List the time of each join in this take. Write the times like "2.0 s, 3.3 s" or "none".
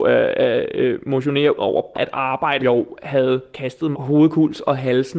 1.6 s, 1.9 s, 2.6 s, 3.9 s